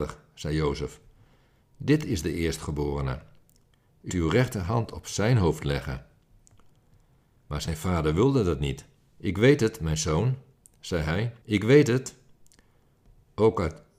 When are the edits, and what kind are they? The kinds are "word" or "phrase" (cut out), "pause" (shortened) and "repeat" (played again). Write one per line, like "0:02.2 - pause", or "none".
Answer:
0:04.1 - word
0:08.9 - pause
0:11.4 - pause